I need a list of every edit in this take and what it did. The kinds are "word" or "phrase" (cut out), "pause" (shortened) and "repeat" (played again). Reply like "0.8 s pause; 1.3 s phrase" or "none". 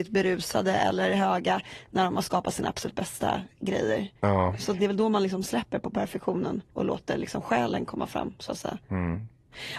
4.2 s pause; 6.7 s pause; 8.8 s pause